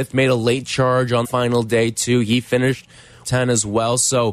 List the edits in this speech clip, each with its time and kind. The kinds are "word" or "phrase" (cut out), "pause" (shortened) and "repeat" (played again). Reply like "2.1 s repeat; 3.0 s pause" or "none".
1.2 s word; 3.2 s phrase

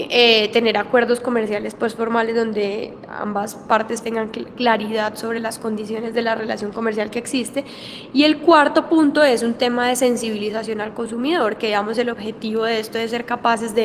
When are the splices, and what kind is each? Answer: 4.0 s word

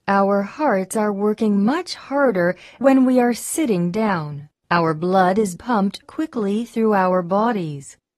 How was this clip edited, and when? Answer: 2.8 s word; 4.6 s pause; 5.6 s word; 6.0 s word

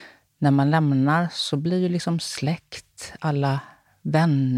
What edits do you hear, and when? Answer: none

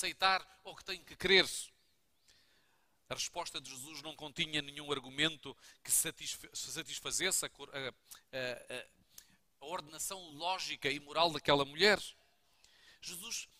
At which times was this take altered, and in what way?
none

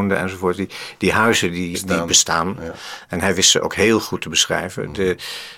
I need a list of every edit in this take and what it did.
1.7 s word

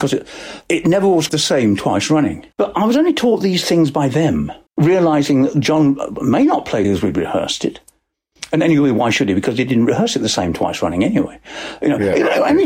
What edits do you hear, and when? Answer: 1.3 s word; 2.5 s pause; 4.7 s pause; 6.8 s phrase

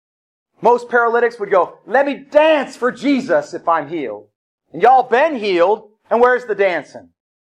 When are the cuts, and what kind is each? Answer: none

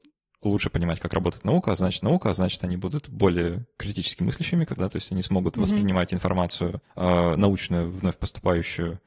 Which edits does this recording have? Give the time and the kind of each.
2.0 s repeat; 4.8 s word; 6.9 s pause

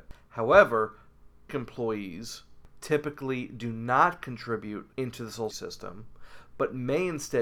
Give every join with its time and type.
1.5 s word; 4.9 s pause; 5.5 s word

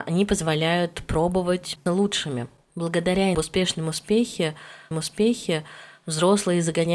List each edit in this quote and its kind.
1.9 s word; 3.3 s phrase; 4.9 s repeat

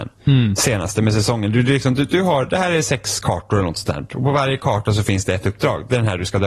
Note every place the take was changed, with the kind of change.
none

